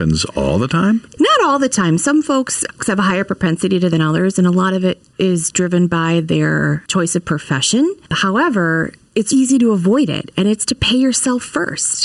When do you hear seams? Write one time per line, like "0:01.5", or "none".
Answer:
0:03.9
0:09.3